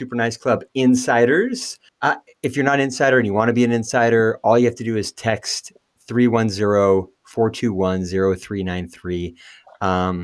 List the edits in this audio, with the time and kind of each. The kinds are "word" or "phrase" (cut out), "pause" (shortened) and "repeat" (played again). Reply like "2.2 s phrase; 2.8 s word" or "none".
1.9 s pause